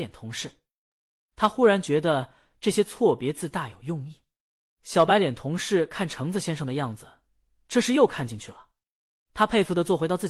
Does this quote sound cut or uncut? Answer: uncut